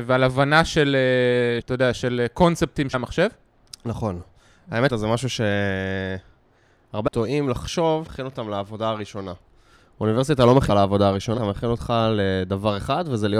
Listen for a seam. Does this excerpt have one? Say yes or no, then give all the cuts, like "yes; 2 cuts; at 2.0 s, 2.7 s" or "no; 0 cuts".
yes; 7 cuts; at 1.6 s, 2.9 s, 4.9 s, 7.1 s, 8.1 s, 10.7 s, 11.4 s